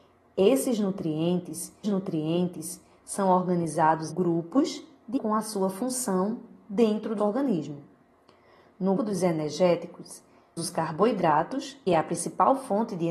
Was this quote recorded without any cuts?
no; 7 cuts; at 1.8 s, 4.1 s, 5.2 s, 7.2 s, 9.0 s, 10.6 s, 11.9 s

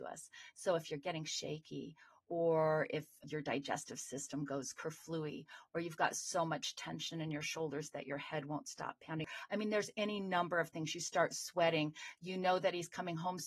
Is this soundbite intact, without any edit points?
yes; 0 cuts

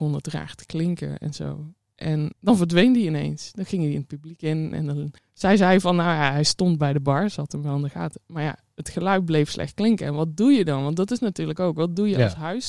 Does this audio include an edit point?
yes; 2 cuts; at 2.3 s, 5.2 s

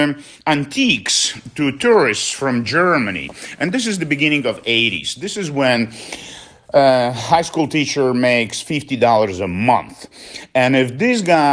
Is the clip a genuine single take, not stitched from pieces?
yes; 0 cuts

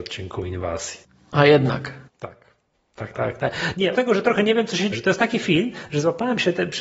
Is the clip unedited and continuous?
no; 5 cuts; at 1.0 s, 2.1 s, 3.1 s, 3.9 s, 4.9 s

